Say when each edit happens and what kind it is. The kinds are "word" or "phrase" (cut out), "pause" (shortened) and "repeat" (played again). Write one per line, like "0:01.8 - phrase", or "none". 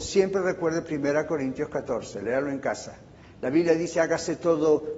none